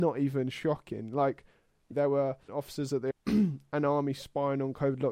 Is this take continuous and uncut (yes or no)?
no